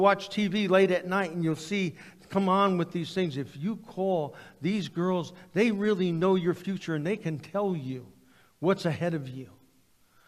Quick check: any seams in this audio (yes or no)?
no